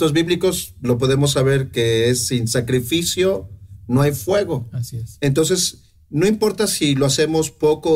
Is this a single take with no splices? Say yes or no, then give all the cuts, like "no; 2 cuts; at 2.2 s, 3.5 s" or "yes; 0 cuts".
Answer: yes; 0 cuts